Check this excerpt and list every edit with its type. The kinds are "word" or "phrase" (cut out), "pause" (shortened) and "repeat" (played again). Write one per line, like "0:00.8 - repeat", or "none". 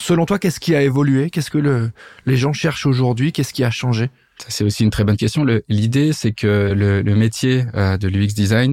none